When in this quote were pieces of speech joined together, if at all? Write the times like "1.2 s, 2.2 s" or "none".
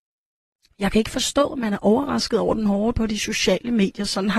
2.9 s

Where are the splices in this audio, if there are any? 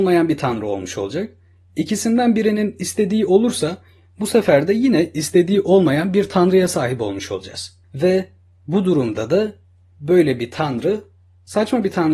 7.8 s

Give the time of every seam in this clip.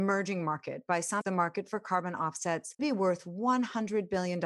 1.2 s, 2.8 s

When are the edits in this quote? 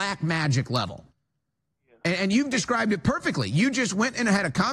none

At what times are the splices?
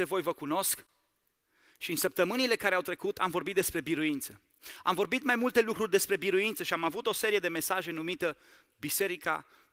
none

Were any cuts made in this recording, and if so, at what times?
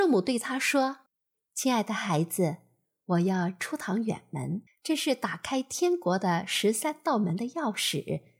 1.1 s, 4.7 s

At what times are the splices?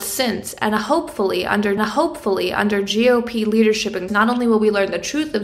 1.8 s, 4.1 s

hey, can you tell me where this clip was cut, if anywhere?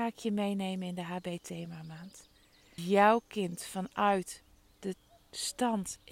2.8 s

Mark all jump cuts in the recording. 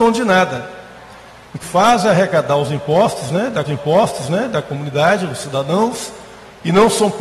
1.6 s, 3.6 s

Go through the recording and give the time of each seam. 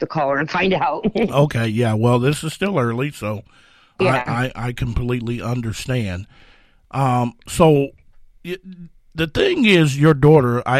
4.0 s

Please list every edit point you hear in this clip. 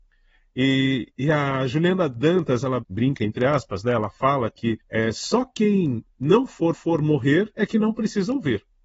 1.1 s, 2.8 s, 4.8 s, 6.7 s

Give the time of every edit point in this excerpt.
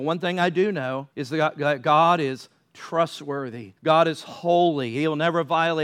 1.1 s, 3.8 s

